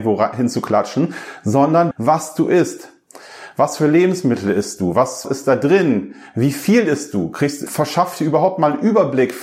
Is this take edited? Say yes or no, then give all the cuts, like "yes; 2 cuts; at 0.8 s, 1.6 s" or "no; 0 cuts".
yes; 3 cuts; at 1.9 s, 5.2 s, 7.7 s